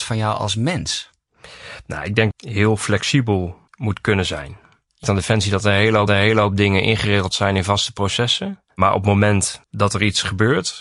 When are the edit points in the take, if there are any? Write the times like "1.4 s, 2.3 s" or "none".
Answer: 2.3 s, 3.7 s, 5.0 s, 6.1 s, 8.7 s, 9.6 s